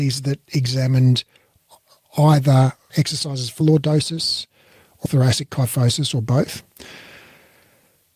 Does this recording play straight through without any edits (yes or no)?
no